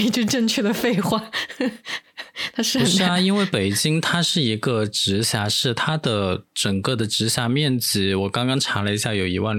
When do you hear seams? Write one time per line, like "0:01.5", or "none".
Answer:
0:06.5